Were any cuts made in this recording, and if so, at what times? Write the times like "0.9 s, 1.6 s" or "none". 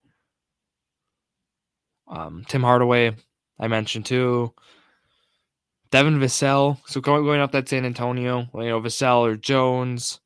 none